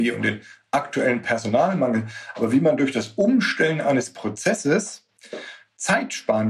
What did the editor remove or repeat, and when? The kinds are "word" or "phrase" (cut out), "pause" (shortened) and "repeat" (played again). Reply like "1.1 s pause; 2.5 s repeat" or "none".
none